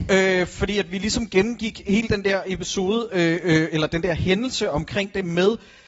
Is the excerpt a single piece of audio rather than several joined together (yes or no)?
yes